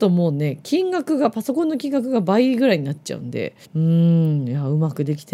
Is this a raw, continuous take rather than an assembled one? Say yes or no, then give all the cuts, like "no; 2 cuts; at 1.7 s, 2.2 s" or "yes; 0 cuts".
no; 1 cut; at 3.6 s